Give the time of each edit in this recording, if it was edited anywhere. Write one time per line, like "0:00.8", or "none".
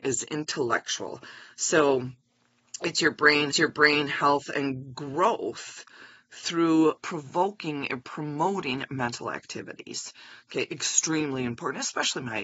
0:03.5
0:07.0